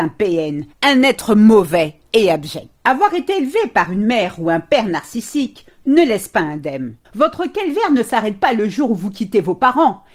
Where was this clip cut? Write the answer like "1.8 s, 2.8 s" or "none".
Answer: 2.7 s, 7.0 s